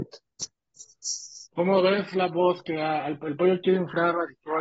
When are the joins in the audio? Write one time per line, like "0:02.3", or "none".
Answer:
0:01.5